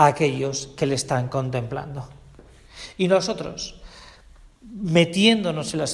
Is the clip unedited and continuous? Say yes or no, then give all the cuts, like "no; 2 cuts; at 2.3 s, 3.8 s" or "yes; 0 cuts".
yes; 0 cuts